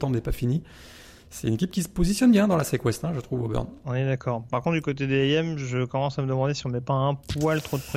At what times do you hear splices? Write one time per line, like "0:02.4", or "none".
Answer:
0:01.2
0:03.8